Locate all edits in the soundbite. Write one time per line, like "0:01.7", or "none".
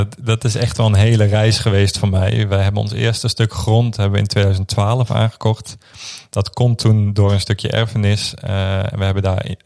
none